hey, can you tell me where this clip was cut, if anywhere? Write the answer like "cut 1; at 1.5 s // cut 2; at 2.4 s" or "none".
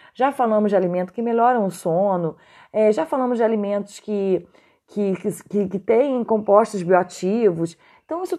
none